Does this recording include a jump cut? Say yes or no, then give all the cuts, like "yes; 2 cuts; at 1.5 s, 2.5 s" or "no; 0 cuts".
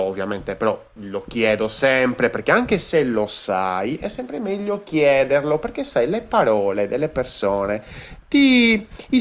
no; 0 cuts